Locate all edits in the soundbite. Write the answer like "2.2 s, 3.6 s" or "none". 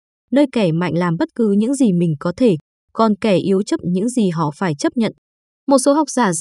3.8 s